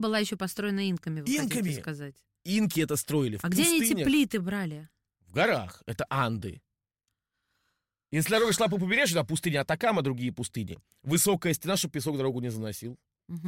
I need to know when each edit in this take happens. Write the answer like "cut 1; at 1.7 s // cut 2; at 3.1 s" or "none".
none